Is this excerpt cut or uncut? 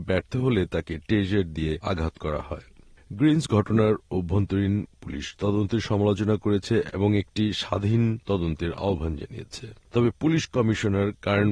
cut